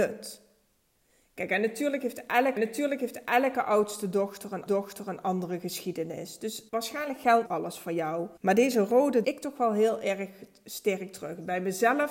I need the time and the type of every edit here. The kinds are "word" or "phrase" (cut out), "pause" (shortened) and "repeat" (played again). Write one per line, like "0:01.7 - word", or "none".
0:02.6 - repeat
0:04.7 - repeat
0:06.7 - pause
0:07.4 - word
0:08.4 - pause
0:09.2 - phrase

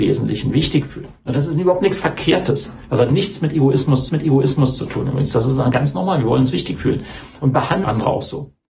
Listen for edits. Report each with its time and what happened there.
0:01.2 - pause
0:04.1 - repeat
0:07.8 - word

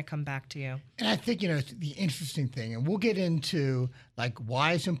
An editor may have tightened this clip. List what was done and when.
none

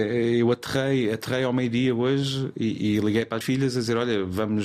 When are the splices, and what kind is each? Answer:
0:03.4 - word

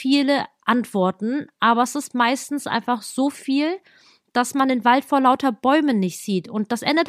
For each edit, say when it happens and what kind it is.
none

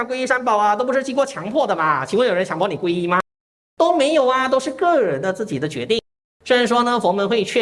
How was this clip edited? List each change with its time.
none

